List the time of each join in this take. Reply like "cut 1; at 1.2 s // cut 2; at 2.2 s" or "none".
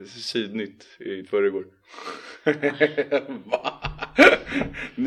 cut 1; at 1.2 s

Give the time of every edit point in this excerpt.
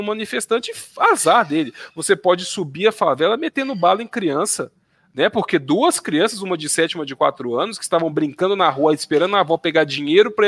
none

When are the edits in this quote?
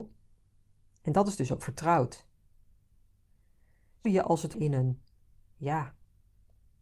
cut 1; at 4.0 s // cut 2; at 4.5 s

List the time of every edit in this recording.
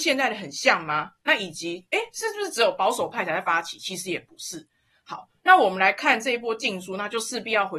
none

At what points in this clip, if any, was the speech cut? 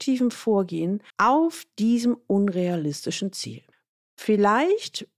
cut 1; at 1.1 s // cut 2; at 3.7 s

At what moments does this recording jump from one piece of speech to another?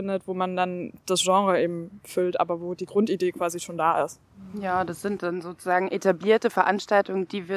cut 1; at 1.0 s

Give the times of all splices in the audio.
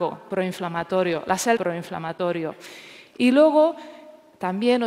cut 1; at 1.6 s

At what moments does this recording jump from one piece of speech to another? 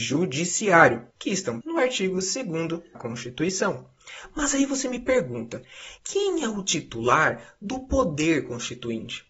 cut 1; at 1.1 s // cut 2; at 1.6 s // cut 3; at 2.9 s // cut 4; at 6.0 s

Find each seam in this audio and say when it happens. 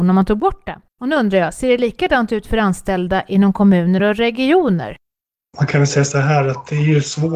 none

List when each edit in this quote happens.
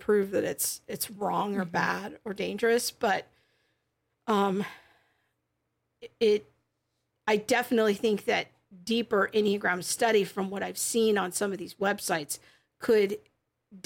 none

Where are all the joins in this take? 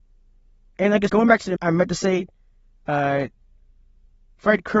cut 1; at 1.1 s // cut 2; at 1.6 s

